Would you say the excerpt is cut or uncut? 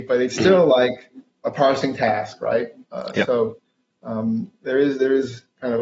uncut